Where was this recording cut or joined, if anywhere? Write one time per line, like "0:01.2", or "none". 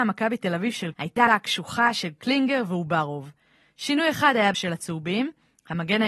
0:00.9
0:01.3
0:04.5